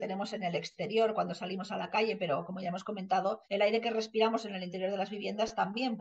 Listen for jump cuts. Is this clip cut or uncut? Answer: cut